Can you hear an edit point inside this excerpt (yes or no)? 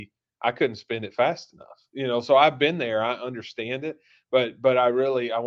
no